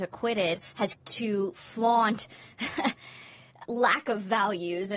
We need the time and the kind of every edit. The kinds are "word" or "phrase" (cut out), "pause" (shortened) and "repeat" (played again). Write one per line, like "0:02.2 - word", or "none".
0:00.9 - word
0:03.6 - word